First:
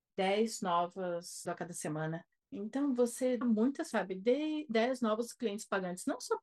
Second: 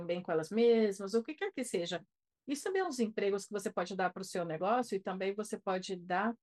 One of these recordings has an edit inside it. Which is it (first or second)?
first